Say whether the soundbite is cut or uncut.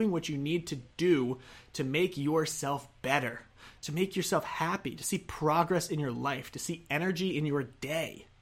uncut